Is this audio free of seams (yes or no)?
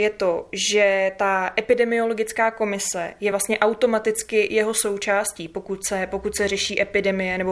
yes